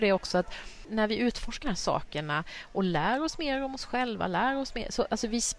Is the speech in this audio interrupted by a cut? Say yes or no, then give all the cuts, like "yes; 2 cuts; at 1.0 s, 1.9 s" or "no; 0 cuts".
yes; 1 cut; at 1.6 s